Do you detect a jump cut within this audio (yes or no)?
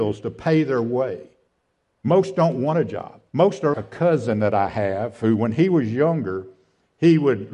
yes